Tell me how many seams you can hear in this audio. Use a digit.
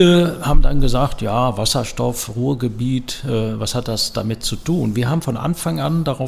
0